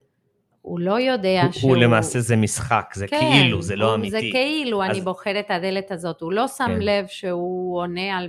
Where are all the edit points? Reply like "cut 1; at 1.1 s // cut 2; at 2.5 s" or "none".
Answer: none